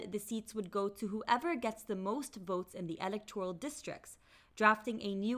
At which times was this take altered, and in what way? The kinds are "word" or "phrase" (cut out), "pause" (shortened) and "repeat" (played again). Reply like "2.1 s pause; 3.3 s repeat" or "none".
none